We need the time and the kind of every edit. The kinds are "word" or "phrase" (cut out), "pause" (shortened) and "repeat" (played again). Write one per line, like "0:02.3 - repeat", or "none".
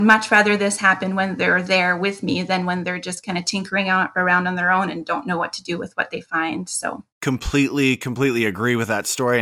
0:07.1 - pause